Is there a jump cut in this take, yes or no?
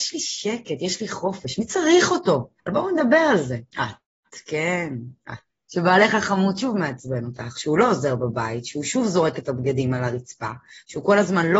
yes